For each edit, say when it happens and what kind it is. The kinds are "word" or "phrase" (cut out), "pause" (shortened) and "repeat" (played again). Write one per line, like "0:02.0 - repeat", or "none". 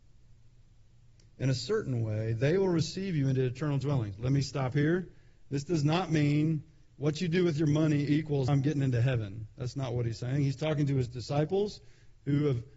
0:08.5 - word